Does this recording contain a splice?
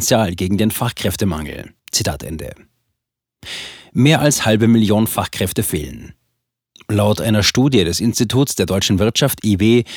yes; 1 cut; at 1.8 s

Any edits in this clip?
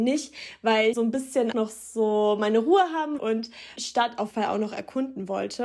yes; 5 cuts; at 0.9 s, 1.5 s, 3.2 s, 3.8 s, 4.3 s

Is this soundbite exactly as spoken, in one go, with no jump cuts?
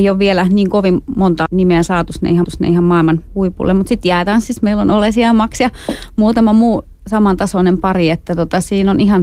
no; 2 cuts; at 1.5 s, 2.4 s

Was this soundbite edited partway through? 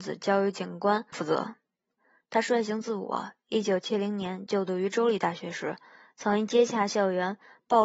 yes; 1 cut; at 1.1 s

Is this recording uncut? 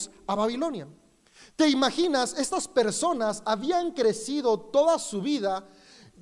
yes; 0 cuts

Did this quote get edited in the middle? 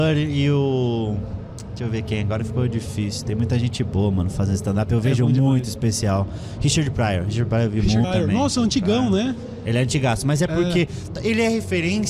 yes; 1 cut; at 8.0 s

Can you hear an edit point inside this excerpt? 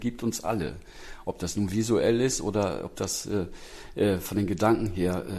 no; 0 cuts

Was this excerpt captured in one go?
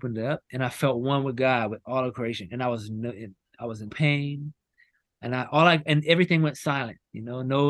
no; 1 cut; at 3.9 s

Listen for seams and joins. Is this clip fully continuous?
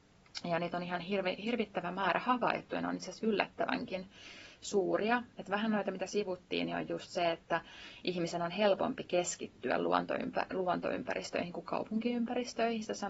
yes; 0 cuts

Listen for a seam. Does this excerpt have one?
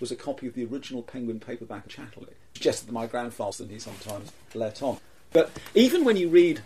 yes; 3 cuts; at 1.9 s, 2.6 s, 3.5 s

